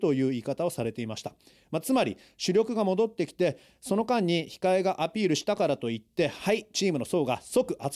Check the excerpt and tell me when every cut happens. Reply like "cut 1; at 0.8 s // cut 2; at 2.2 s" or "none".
none